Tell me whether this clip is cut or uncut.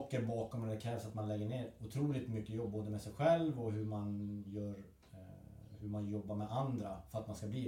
uncut